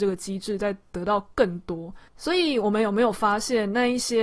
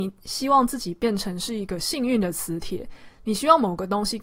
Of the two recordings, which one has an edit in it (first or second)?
first